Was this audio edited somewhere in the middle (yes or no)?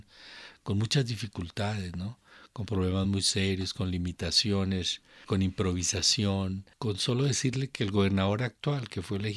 no